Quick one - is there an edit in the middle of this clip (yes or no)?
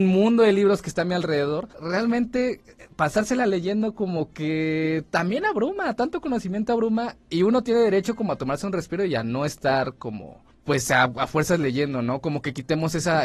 yes